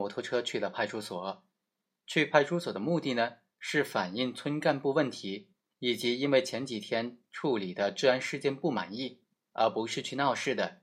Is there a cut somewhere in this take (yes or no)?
no